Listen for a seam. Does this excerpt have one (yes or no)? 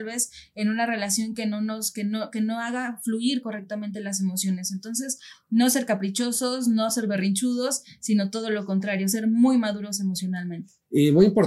no